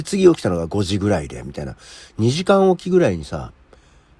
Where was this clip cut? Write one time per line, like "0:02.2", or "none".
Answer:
none